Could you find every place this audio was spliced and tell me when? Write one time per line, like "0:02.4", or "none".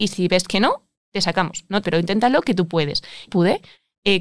0:01.8
0:03.3